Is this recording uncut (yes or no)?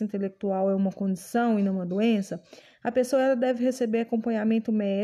yes